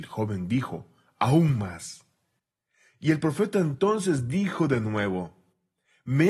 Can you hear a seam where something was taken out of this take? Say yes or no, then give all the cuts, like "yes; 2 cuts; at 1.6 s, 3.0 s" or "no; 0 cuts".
no; 0 cuts